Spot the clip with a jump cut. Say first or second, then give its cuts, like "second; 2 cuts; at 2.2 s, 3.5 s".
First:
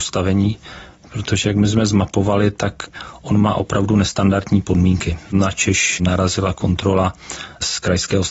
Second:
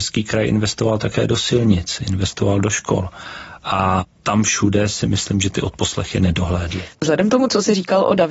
second; 1 cut; at 6.9 s